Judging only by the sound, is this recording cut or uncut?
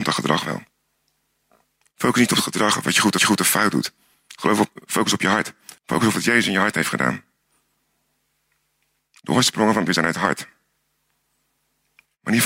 cut